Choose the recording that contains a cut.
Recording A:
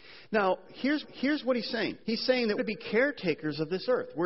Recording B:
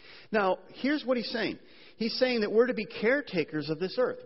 A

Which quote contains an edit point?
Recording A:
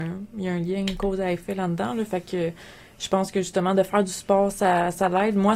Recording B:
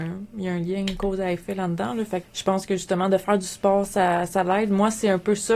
B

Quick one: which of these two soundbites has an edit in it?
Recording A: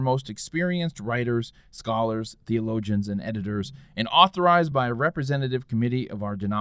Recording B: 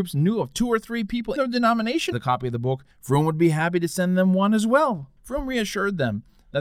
B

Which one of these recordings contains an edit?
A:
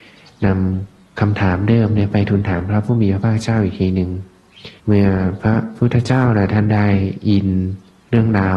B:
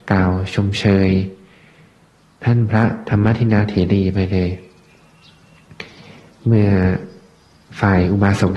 A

